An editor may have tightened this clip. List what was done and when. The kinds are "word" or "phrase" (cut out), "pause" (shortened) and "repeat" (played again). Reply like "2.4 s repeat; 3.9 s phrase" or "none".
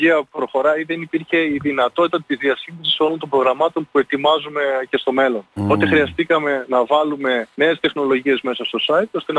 5.5 s pause; 7.5 s pause